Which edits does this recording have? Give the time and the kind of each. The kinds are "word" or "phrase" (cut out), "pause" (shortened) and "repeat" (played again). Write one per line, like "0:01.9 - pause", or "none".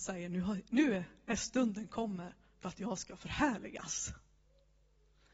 none